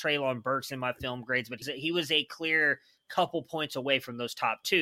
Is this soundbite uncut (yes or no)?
no